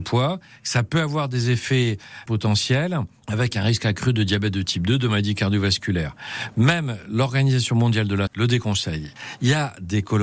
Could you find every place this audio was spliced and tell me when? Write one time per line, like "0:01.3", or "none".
0:02.3
0:08.3